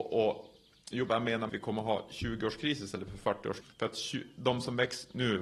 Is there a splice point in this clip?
yes; 3 cuts; at 1.1 s, 1.5 s, 3.6 s

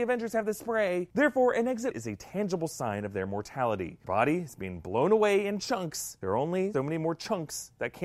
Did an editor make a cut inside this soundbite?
yes; 3 cuts; at 1.9 s, 4.0 s, 6.7 s

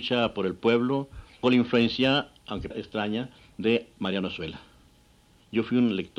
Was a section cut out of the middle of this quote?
yes; 2 cuts; at 1.4 s, 2.7 s

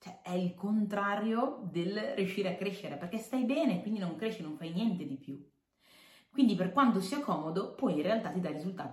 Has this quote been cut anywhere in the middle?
no; 0 cuts

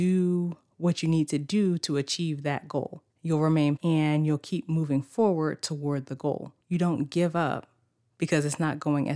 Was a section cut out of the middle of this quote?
yes; 3 cuts; at 3.1 s, 3.8 s, 6.6 s

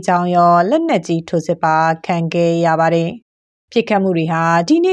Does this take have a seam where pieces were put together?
yes; 1 cut; at 3.2 s

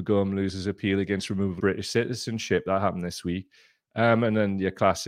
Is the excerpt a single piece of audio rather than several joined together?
no; 1 cut; at 1.6 s

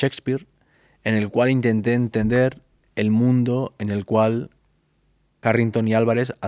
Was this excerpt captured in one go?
yes; 0 cuts

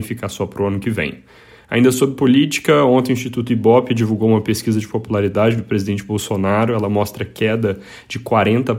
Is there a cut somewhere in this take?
no; 0 cuts

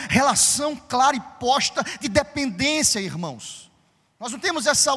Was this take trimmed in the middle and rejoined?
no; 0 cuts

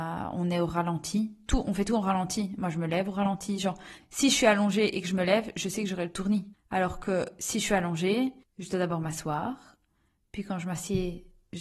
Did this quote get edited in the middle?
yes; 3 cuts; at 4.0 s, 6.5 s, 8.4 s

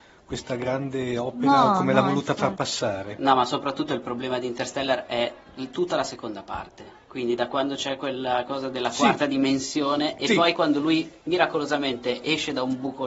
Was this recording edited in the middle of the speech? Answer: yes; 1 cut; at 11.2 s

